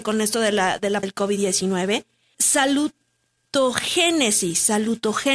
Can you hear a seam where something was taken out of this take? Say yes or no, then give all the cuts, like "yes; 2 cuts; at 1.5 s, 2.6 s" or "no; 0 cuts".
yes; 2 cuts; at 1.0 s, 2.3 s